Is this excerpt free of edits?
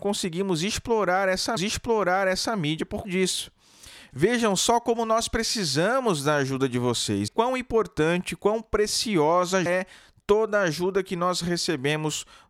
no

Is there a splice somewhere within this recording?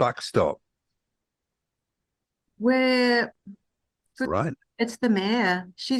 yes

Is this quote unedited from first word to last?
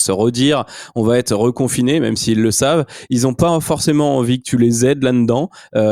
yes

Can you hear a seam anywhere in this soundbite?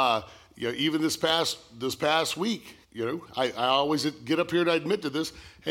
yes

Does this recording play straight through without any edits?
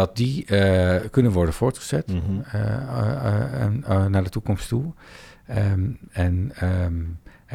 yes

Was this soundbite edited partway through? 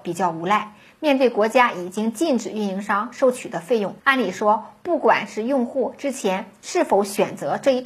yes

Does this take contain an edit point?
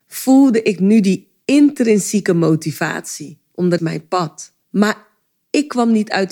yes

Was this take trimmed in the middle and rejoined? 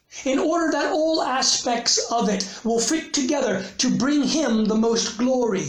no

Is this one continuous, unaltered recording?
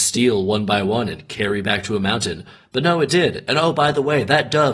yes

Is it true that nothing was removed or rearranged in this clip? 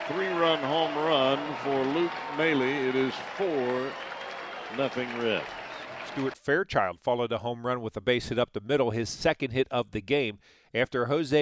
yes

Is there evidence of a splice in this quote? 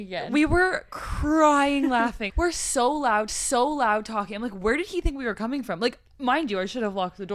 yes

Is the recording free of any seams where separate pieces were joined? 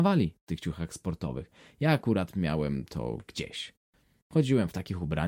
yes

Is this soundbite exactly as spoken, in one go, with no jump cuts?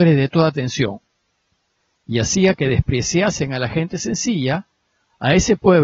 yes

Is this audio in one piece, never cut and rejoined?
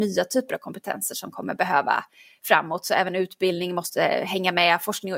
yes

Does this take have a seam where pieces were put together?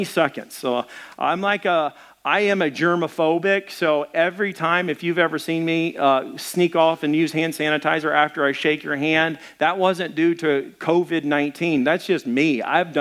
no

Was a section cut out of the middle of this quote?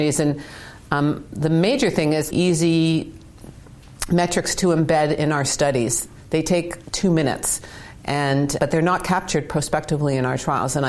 yes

